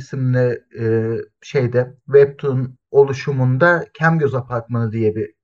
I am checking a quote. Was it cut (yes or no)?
no